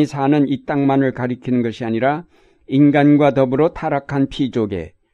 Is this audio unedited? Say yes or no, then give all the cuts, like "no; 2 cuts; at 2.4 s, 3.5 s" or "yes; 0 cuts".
yes; 0 cuts